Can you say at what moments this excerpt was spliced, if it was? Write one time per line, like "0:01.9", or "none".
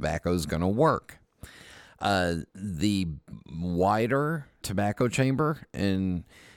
0:02.5
0:04.6